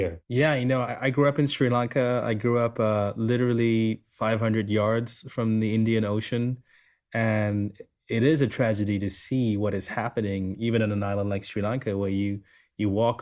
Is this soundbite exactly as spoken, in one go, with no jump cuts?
yes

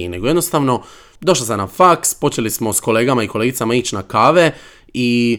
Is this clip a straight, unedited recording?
yes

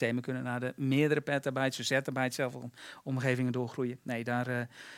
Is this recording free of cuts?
yes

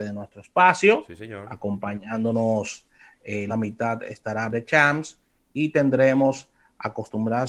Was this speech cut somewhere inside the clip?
yes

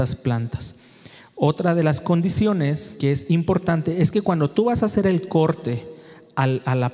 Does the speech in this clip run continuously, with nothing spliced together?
yes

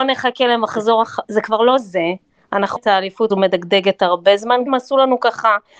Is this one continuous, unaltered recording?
no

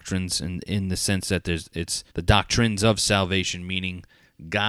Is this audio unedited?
no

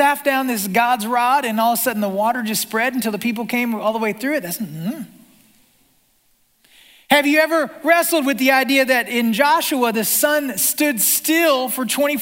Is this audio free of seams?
yes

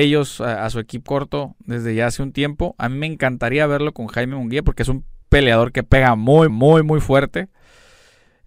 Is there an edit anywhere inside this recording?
yes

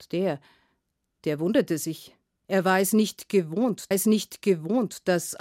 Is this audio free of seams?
no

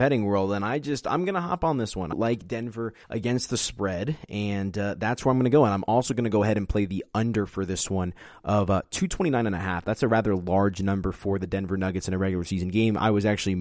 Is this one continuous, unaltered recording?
no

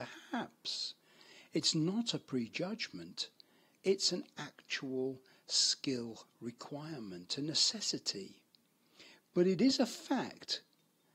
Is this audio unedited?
yes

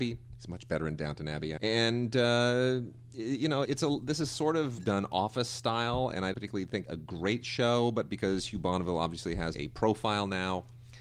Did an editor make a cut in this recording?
yes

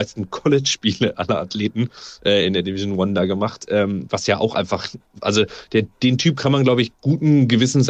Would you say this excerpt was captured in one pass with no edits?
yes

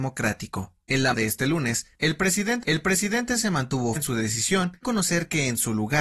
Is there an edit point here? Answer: yes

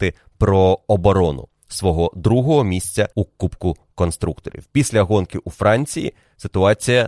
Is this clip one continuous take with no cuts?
no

